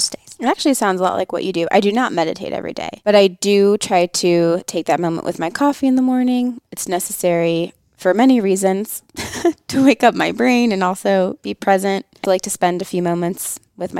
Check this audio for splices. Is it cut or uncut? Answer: cut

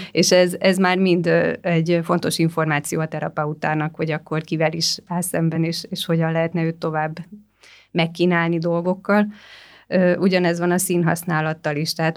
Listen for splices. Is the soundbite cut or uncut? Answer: uncut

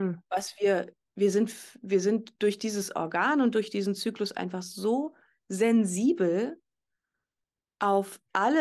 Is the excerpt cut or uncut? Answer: uncut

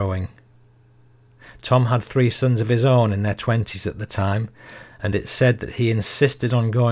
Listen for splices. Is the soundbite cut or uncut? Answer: uncut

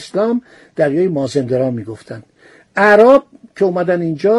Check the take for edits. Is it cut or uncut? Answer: uncut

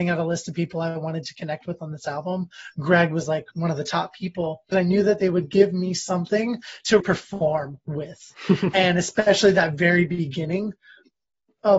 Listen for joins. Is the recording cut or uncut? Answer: cut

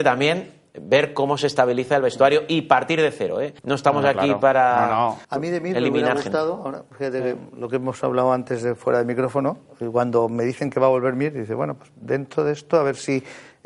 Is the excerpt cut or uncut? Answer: cut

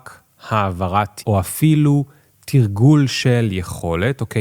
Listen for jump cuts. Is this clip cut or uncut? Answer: cut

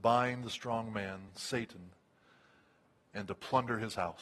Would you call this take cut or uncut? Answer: uncut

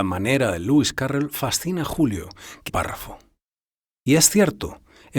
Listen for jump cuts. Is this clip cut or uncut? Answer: cut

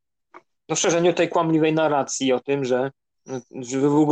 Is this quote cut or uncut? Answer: uncut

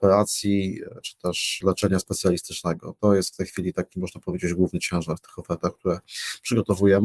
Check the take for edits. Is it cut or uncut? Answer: uncut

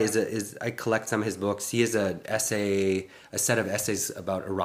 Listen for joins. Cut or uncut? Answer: uncut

